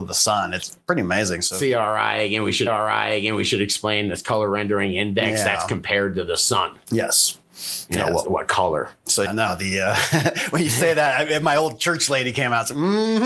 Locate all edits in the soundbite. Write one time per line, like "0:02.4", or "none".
0:02.7
0:08.2
0:09.2